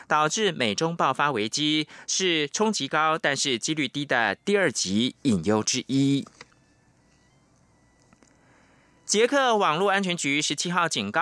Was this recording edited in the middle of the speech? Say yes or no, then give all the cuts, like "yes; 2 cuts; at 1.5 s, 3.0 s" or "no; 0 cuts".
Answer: no; 0 cuts